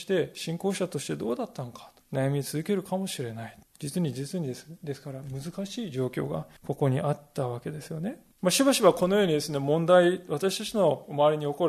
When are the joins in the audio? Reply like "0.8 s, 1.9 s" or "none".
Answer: 2.0 s, 3.6 s, 6.6 s, 8.3 s